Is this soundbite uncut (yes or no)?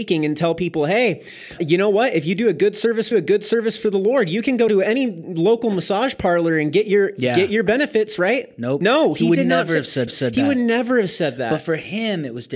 no